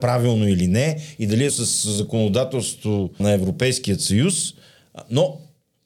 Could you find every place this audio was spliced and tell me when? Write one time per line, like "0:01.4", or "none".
0:01.5
0:03.2